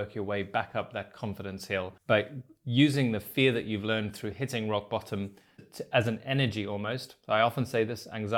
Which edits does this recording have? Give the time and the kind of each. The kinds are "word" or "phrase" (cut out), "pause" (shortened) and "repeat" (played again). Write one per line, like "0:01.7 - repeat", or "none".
0:02.0 - pause
0:05.6 - word